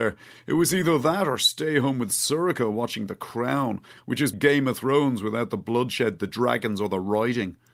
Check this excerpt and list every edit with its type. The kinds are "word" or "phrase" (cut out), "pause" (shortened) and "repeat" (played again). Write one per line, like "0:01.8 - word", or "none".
0:04.3 - word